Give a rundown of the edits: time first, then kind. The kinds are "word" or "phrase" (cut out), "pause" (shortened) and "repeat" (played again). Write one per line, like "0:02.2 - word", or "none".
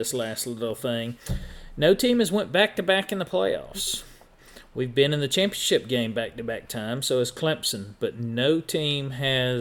none